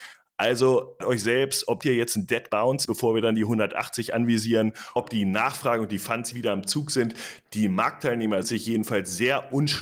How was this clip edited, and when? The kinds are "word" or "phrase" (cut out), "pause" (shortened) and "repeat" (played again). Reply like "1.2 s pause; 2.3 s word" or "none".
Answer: 1.0 s word; 1.8 s word; 2.5 s word; 2.8 s word; 5.0 s word; 6.3 s word; 8.4 s word